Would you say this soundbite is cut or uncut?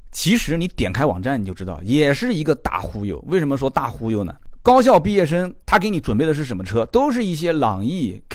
cut